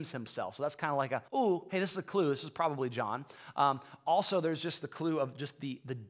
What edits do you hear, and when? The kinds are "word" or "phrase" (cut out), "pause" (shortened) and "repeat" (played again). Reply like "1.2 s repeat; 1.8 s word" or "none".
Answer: 1.3 s pause